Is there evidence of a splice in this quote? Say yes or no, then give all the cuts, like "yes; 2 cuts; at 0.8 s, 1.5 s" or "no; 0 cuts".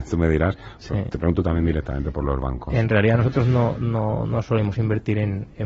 no; 0 cuts